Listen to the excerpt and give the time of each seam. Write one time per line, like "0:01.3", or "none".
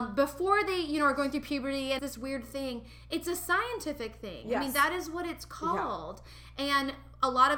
0:02.0